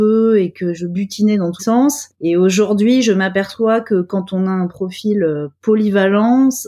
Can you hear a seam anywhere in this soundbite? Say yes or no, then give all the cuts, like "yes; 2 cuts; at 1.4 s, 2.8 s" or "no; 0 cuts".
yes; 1 cut; at 1.6 s